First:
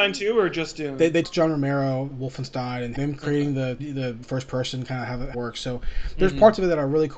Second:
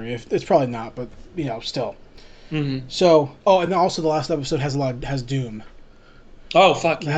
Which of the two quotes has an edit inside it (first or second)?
first